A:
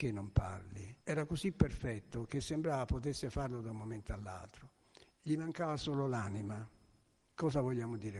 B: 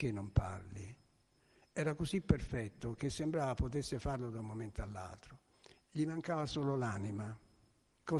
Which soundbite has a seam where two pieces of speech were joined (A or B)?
A